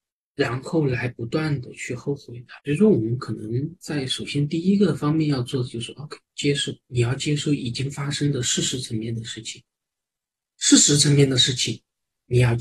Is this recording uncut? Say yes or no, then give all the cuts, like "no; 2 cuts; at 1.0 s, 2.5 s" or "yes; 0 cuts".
no; 2 cuts; at 2.6 s, 6.2 s